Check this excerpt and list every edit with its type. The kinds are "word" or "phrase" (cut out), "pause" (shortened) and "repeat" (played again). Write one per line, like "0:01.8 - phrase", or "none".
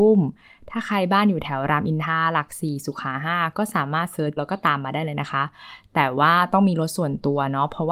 0:04.4 - word